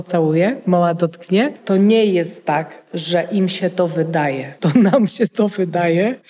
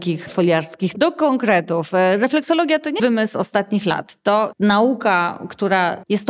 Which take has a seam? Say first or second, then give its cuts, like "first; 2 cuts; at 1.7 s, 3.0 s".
second; 3 cuts; at 0.9 s, 3.0 s, 4.5 s